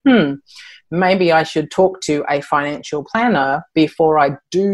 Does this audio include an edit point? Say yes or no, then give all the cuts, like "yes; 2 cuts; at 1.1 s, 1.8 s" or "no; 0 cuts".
no; 0 cuts